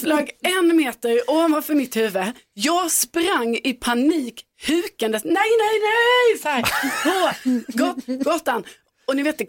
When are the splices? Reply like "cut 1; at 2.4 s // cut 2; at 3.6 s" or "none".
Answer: none